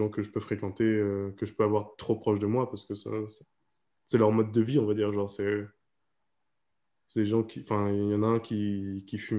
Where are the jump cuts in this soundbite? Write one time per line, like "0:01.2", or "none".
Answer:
none